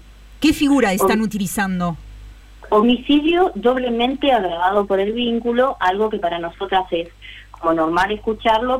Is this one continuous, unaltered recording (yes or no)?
yes